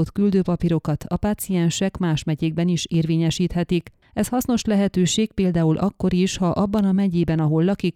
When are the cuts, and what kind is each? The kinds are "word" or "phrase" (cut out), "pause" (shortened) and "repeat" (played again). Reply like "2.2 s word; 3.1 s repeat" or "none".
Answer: none